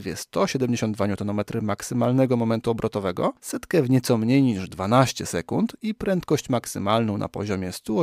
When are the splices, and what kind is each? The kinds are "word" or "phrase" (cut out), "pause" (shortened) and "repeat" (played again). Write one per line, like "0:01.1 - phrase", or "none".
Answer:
0:03.4 - pause